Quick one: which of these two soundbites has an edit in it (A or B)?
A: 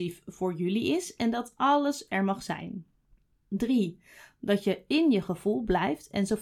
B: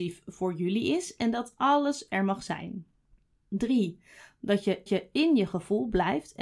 B